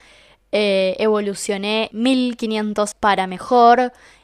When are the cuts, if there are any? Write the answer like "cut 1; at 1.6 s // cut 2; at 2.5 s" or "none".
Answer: cut 1; at 1.9 s // cut 2; at 2.9 s